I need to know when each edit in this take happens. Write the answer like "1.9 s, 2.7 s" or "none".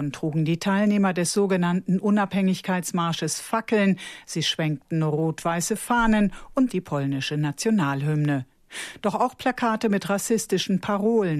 6.7 s